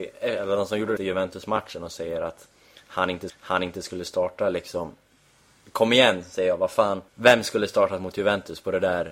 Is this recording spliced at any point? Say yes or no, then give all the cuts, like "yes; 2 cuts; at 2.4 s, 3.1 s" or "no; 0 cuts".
yes; 3 cuts; at 1.0 s, 3.3 s, 7.1 s